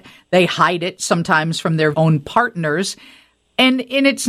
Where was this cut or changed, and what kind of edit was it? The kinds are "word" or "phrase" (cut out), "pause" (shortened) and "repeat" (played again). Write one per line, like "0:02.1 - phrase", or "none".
0:01.9 - word

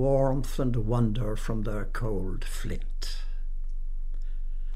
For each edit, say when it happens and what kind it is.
none

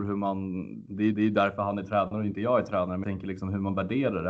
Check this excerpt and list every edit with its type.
0:01.1 - repeat
0:03.0 - word

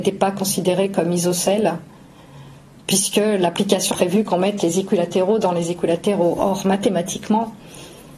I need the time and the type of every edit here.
0:03.9 - word

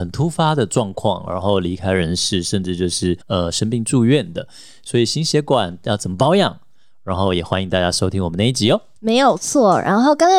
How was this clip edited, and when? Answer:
0:03.2 - pause

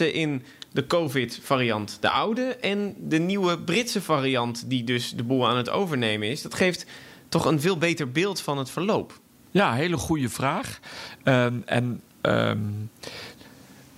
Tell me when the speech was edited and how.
none

